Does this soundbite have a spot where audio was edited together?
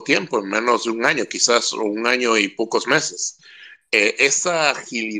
no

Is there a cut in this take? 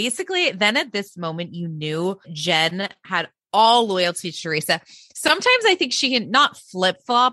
yes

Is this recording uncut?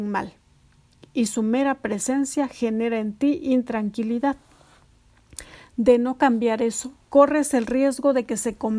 no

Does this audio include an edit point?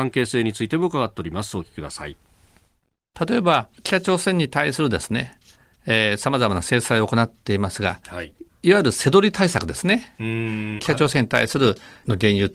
yes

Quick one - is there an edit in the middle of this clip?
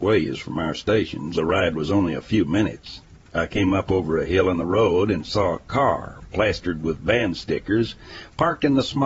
yes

